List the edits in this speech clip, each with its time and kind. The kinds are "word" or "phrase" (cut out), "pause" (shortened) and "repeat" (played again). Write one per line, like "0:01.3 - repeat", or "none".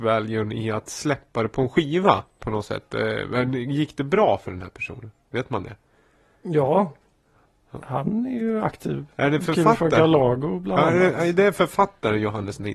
none